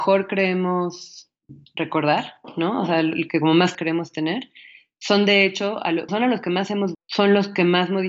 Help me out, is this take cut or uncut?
cut